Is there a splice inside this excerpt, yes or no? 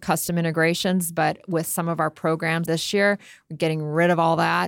yes